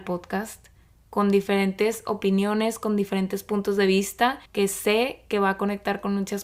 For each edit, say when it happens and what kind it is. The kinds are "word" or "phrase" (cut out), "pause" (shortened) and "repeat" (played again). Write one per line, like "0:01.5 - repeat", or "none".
0:04.5 - pause